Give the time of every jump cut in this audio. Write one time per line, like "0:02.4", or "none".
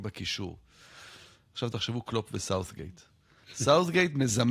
none